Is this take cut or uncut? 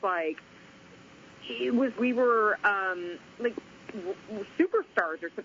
cut